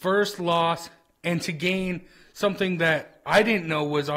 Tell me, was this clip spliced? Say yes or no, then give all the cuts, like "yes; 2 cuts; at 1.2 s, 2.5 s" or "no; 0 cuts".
no; 0 cuts